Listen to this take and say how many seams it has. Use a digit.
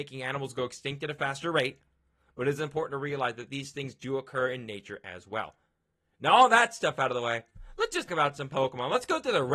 1